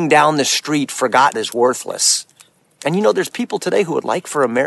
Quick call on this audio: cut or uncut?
cut